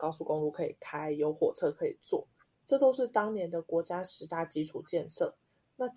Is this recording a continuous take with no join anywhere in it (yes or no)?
yes